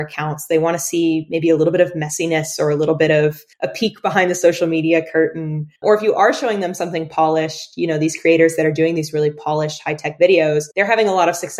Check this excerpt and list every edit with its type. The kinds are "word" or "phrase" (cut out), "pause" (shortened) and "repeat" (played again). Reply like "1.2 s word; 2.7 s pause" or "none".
3.5 s pause; 5.8 s pause; 10.7 s pause